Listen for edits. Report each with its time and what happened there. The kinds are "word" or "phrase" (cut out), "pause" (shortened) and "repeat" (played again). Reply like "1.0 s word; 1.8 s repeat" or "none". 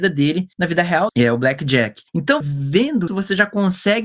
1.1 s word; 2.4 s word; 3.1 s word